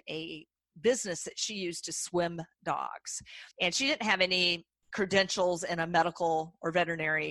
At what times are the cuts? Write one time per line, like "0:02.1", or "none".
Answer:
0:03.5